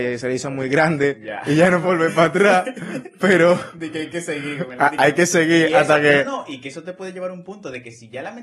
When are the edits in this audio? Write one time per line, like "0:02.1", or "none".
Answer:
0:01.8